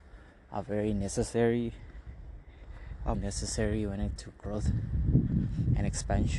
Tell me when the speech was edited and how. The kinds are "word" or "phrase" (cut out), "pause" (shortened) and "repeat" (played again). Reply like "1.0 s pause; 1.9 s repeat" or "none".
3.1 s word; 4.2 s word

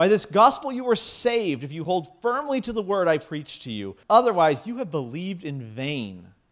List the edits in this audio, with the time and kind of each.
4.0 s pause

